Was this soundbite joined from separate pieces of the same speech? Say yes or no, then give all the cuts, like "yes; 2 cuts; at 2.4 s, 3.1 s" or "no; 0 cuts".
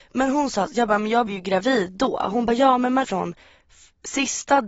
yes; 2 cuts; at 1.3 s, 3.0 s